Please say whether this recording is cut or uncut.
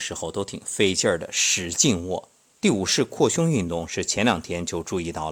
cut